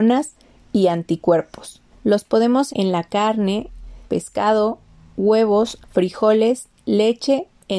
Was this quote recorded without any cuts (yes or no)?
no